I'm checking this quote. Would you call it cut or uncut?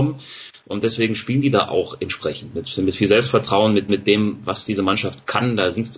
cut